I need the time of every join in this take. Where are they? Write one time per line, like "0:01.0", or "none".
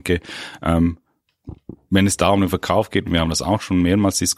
none